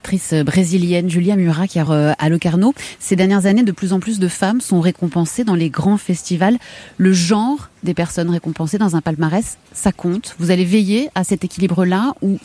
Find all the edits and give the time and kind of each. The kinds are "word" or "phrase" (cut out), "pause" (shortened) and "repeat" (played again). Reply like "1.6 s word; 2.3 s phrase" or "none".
1.9 s phrase; 7.8 s pause

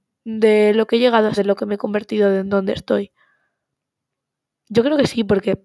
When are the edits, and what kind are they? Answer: 1.4 s word

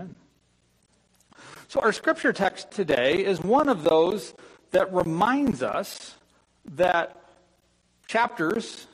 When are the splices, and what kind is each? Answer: none

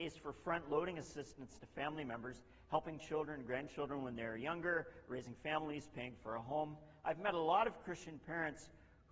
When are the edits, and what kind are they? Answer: none

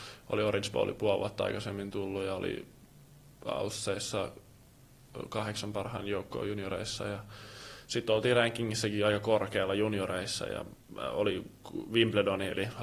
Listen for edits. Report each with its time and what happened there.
10.8 s pause

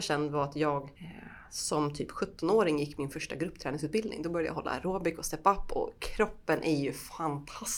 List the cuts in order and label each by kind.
0.9 s pause

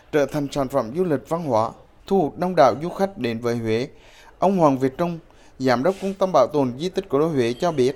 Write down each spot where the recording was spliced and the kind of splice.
none

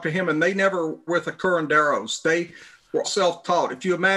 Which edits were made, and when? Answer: 1.1 s word; 3.0 s word

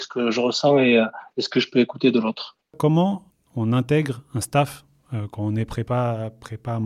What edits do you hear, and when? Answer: 3.3 s pause

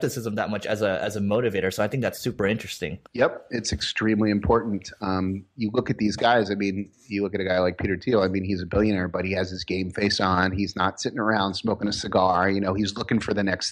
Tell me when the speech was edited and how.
3.1 s pause

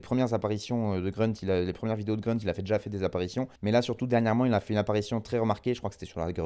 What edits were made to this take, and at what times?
3.6 s pause

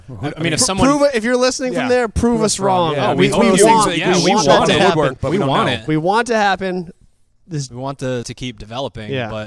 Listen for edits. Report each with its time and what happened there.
7.7 s word; 8.2 s word

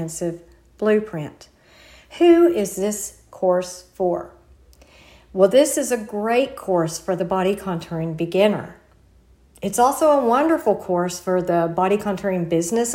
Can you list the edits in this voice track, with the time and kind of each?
none

